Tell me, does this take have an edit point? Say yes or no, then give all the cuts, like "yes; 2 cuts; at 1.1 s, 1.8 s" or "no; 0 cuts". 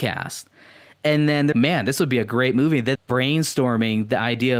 yes; 2 cuts; at 1.5 s, 2.9 s